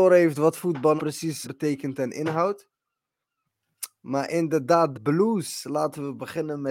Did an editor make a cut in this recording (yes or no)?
yes